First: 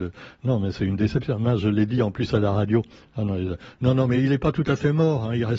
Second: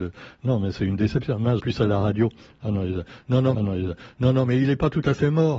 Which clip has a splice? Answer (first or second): second